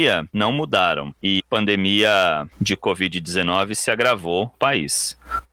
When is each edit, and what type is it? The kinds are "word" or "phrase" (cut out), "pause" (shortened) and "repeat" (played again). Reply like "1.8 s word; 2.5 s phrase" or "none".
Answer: 1.4 s word; 2.5 s pause; 4.5 s word